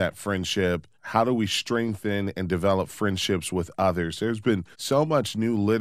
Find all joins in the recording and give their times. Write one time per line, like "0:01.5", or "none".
0:00.9
0:04.7